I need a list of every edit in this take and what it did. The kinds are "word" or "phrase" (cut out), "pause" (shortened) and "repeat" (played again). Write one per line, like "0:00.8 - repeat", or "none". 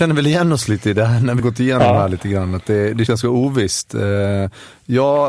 0:01.4 - word
0:03.1 - word

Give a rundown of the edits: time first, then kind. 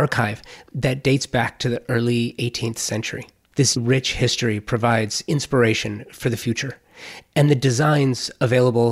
0:03.8 - word

